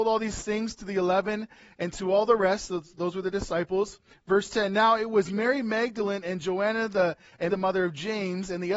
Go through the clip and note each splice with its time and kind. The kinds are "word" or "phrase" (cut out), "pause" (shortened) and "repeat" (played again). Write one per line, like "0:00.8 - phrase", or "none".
0:07.5 - word